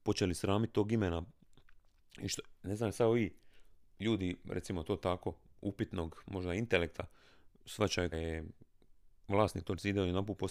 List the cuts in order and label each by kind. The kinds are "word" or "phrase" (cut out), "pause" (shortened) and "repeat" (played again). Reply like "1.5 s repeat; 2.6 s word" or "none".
8.1 s word